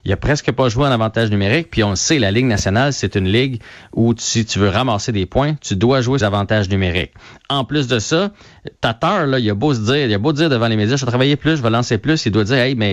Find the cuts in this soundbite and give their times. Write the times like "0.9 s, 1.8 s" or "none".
6.2 s